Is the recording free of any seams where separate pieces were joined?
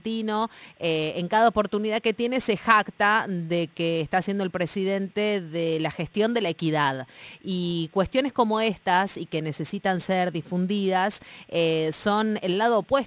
yes; 0 cuts

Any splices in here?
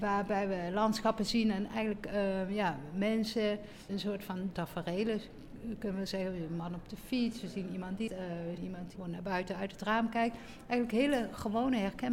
yes; 5 cuts; at 3.9 s, 4.5 s, 8.1 s, 8.6 s, 9.0 s

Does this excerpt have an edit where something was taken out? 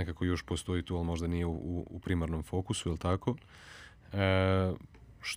no; 0 cuts

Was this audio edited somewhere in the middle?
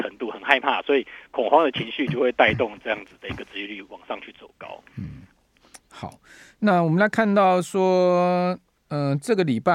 yes; 1 cut; at 5.8 s

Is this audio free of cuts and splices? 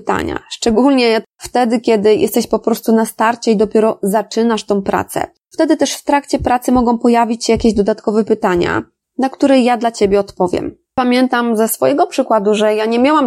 yes; 0 cuts

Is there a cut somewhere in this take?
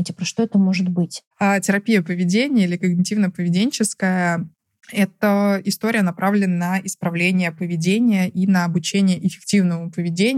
yes; 2 cuts; at 1.3 s, 4.5 s

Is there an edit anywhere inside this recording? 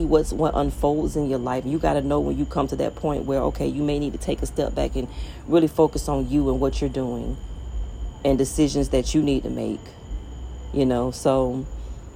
no; 0 cuts

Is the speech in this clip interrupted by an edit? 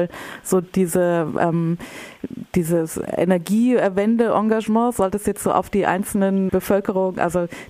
yes; 1 cut; at 6.5 s

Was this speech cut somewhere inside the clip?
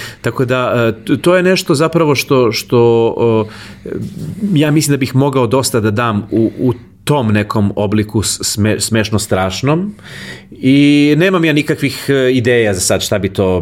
no; 0 cuts

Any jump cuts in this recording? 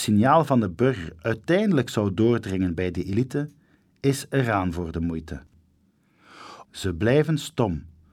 no; 0 cuts

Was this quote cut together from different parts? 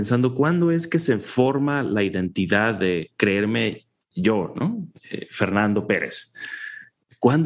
no; 0 cuts

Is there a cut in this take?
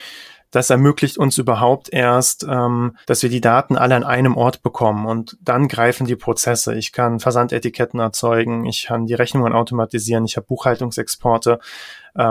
yes; 1 cut; at 3.0 s

